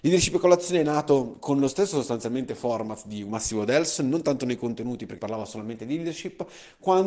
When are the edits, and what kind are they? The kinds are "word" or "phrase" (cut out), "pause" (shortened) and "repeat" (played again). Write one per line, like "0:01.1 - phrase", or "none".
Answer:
0:05.2 - word